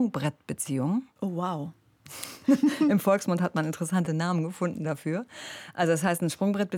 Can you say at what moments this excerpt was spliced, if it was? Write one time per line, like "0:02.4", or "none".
none

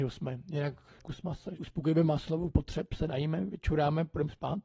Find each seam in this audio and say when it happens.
0:01.0
0:01.6
0:02.5

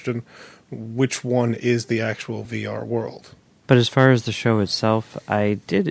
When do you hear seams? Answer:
none

